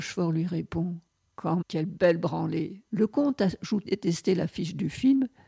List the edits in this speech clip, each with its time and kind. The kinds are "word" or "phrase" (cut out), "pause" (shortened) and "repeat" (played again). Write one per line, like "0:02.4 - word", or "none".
0:01.6 - word
0:02.9 - pause
0:03.8 - word